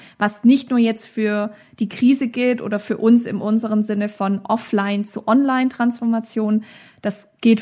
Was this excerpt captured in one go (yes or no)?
yes